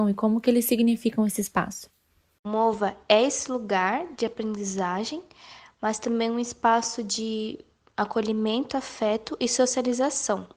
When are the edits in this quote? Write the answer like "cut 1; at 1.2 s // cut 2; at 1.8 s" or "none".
none